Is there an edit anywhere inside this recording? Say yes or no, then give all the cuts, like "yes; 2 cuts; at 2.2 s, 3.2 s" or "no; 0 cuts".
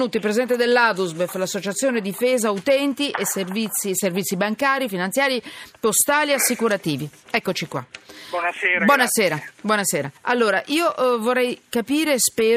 yes; 1 cut; at 10.2 s